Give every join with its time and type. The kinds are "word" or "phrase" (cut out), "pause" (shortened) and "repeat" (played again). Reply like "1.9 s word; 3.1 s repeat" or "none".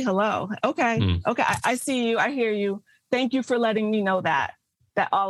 none